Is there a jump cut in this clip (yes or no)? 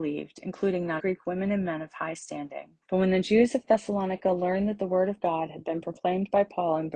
yes